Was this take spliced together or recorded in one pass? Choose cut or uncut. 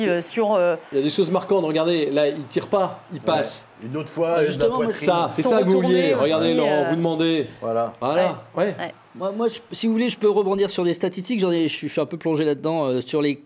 uncut